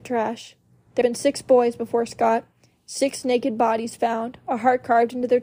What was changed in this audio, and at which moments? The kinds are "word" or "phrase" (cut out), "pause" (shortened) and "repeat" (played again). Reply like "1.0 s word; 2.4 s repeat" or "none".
1.0 s word